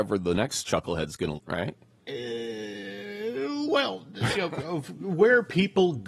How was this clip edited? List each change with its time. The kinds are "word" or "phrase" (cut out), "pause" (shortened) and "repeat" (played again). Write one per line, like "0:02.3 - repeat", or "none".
0:01.4 - phrase
0:04.3 - word